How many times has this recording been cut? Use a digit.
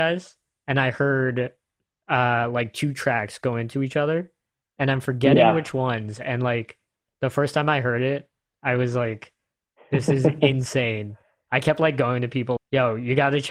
1